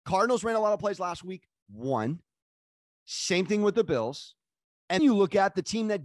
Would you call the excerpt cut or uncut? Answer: cut